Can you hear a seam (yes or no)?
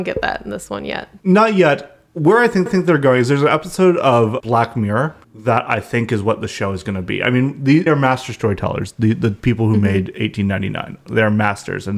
yes